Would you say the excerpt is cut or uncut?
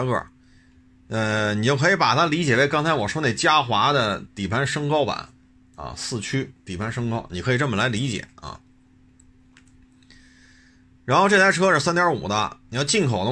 uncut